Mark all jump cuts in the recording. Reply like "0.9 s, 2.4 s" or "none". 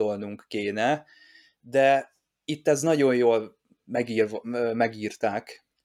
none